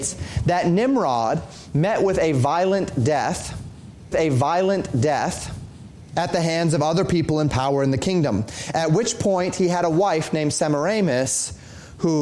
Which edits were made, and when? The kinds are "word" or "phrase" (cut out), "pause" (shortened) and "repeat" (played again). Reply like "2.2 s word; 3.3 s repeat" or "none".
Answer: 4.1 s repeat